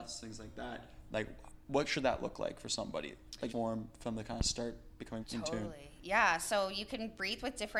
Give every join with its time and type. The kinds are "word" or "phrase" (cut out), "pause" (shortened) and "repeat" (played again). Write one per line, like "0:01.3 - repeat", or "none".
0:03.5 - phrase
0:05.2 - phrase